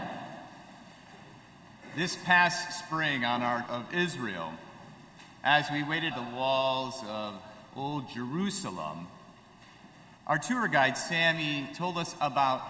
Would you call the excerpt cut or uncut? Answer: cut